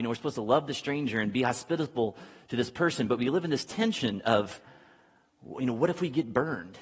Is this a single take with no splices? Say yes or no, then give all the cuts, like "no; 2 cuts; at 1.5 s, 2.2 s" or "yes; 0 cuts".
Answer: yes; 0 cuts